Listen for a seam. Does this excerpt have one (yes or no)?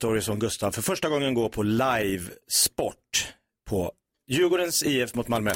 no